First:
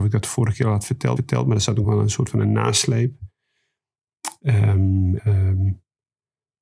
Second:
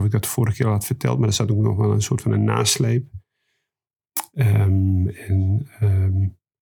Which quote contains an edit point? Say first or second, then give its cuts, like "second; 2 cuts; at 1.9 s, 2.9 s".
first; 3 cuts; at 1.2 s, 1.8 s, 5.2 s